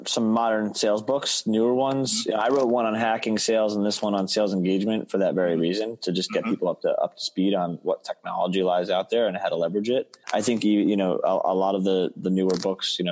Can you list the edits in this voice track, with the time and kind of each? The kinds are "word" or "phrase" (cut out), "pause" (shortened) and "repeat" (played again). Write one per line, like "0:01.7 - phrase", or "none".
0:10.2 - pause